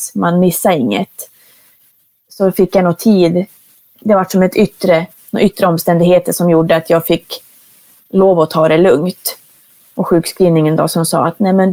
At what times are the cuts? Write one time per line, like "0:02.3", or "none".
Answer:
none